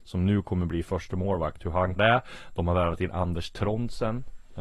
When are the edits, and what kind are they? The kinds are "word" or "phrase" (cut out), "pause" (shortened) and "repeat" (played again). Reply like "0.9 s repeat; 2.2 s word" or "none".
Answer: 2.0 s word

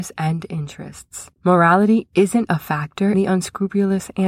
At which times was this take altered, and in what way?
1.3 s pause; 2.5 s word; 3.1 s word

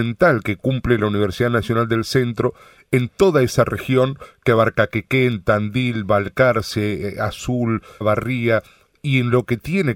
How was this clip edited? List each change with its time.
8.0 s phrase

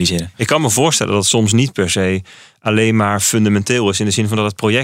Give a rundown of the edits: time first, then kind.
none

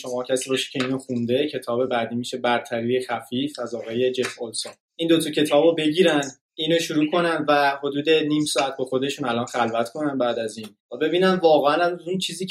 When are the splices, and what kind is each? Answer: none

